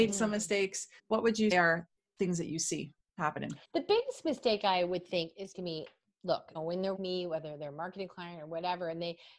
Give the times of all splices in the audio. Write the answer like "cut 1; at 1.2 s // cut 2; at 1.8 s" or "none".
cut 1; at 1.0 s // cut 2; at 1.5 s // cut 3; at 3.6 s // cut 4; at 5.5 s // cut 5; at 6.5 s // cut 6; at 6.9 s